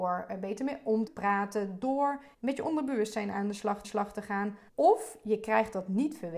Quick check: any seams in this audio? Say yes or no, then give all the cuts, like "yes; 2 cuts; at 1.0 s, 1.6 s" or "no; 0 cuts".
yes; 4 cuts; at 1.1 s, 2.3 s, 3.8 s, 4.7 s